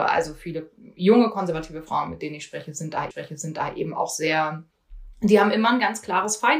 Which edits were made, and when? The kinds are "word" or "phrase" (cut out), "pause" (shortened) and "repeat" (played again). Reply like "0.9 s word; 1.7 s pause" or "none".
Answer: 3.1 s repeat